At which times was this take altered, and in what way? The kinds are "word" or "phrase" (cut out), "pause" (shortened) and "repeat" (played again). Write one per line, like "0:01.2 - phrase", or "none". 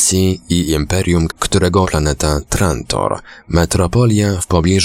0:01.3 - word
0:01.8 - phrase